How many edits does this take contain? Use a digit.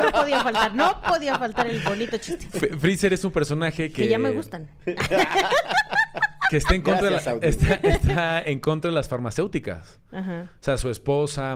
0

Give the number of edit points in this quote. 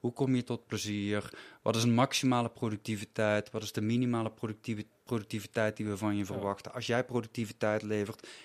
1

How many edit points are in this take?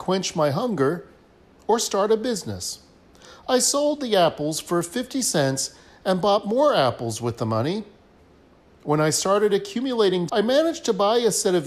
1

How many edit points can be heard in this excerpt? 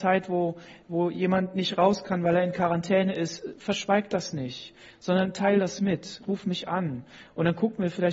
0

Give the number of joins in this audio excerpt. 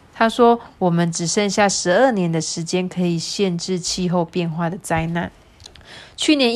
1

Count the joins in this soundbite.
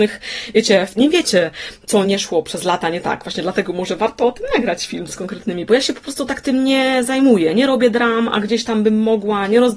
3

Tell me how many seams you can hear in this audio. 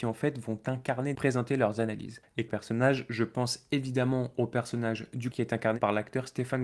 3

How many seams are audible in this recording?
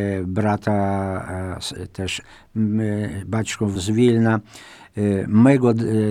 3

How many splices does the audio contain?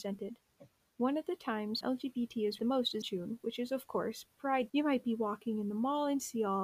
4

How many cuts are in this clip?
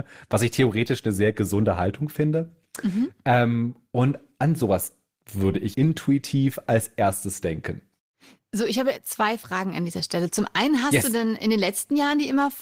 1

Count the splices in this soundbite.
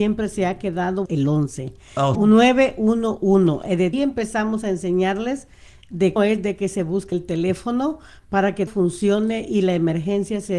6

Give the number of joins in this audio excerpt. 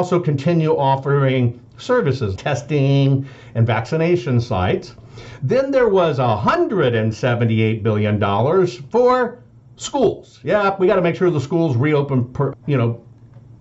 2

